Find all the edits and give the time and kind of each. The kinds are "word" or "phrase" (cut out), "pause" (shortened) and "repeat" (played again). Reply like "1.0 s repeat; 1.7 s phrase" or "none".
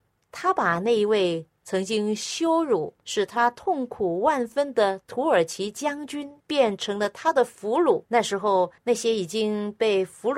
2.9 s pause; 6.4 s pause; 8.1 s pause; 8.8 s pause